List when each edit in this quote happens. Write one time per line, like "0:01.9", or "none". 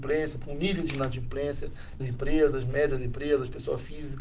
0:02.0